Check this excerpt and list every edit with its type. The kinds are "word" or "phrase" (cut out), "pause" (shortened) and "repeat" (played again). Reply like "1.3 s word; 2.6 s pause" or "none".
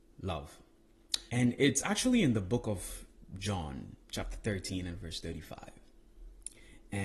1.3 s pause; 4.0 s pause